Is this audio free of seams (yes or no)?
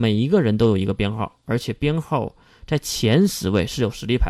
yes